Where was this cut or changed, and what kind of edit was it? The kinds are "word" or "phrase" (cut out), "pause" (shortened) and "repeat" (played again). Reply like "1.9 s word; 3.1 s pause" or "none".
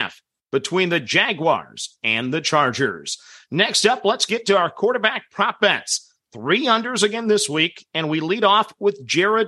none